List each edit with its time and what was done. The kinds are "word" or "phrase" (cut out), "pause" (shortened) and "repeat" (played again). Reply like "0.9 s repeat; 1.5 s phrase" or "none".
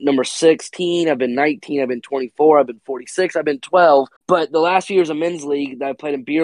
4.2 s pause